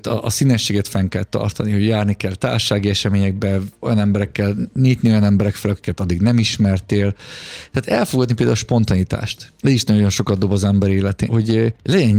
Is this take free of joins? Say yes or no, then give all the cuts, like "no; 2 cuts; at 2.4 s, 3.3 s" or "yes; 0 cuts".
no; 1 cut; at 11.3 s